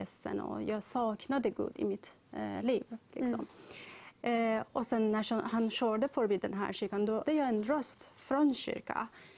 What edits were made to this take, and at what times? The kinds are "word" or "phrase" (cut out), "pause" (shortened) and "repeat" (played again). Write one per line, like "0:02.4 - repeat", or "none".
0:07.3 - word